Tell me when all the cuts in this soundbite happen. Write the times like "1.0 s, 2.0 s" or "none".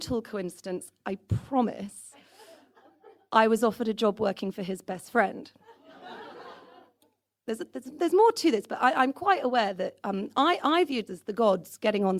11.1 s